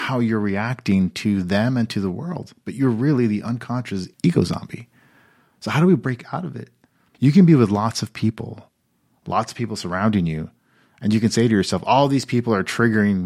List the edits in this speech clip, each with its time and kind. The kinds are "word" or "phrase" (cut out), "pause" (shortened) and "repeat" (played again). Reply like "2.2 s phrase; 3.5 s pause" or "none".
4.1 s pause